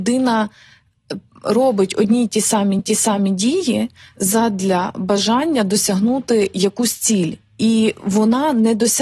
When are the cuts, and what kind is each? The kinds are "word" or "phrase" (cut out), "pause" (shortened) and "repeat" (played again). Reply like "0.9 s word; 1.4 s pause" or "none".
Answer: 2.8 s repeat